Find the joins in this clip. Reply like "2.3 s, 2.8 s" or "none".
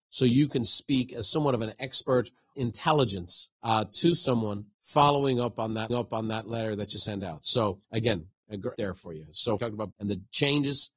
2.5 s, 3.5 s, 4.7 s, 5.9 s, 7.8 s, 8.7 s, 9.6 s, 9.9 s